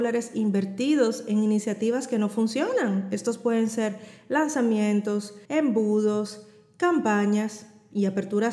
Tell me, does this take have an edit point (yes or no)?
yes